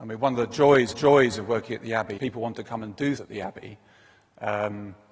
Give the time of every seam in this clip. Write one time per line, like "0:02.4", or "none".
0:00.9
0:02.2
0:03.2